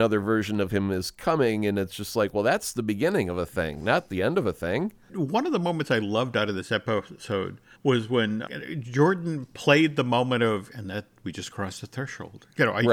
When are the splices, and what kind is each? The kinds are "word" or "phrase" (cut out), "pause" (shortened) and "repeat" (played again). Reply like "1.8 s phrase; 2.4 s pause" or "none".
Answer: 5.0 s pause; 7.7 s pause